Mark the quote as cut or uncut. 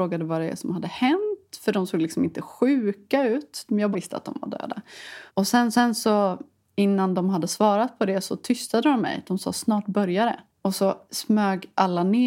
cut